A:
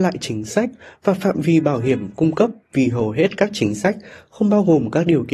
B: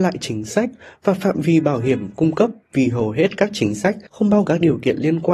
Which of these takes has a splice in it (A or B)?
B